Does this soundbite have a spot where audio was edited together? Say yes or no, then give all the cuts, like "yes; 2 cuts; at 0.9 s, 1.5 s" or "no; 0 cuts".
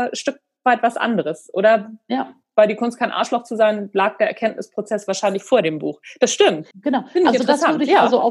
yes; 1 cut; at 6.7 s